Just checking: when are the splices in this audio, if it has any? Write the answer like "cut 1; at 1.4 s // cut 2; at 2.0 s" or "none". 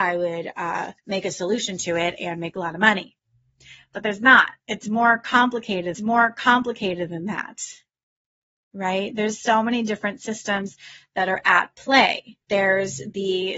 cut 1; at 1.0 s // cut 2; at 4.6 s // cut 3; at 5.9 s // cut 4; at 12.4 s